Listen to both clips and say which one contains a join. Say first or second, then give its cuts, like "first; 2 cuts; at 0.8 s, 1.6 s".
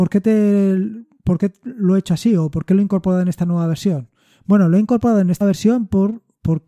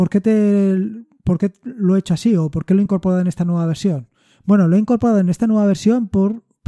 first; 1 cut; at 5.4 s